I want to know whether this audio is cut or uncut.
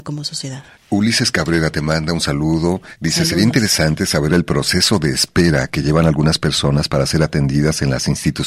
uncut